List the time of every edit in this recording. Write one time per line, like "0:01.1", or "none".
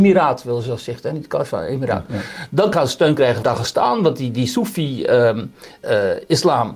0:02.7
0:03.4
0:05.8